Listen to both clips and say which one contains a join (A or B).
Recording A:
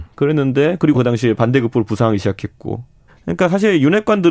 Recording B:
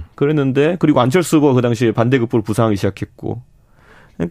A